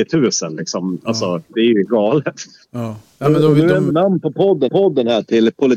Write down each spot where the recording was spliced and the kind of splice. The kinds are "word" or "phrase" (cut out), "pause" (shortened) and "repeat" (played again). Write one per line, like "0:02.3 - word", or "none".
0:01.8 - word
0:03.9 - word
0:04.7 - repeat